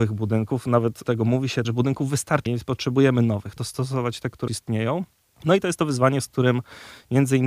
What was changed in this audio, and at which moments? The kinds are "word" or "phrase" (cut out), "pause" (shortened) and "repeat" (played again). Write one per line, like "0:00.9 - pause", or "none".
0:01.0 - word
0:01.6 - word
0:02.5 - word
0:03.6 - word
0:04.5 - word